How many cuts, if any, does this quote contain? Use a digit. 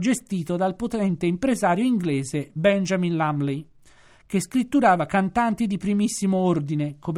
0